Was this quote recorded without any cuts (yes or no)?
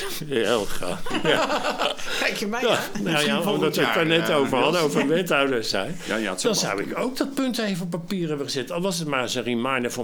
yes